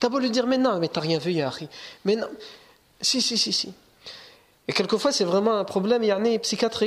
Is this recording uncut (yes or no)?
yes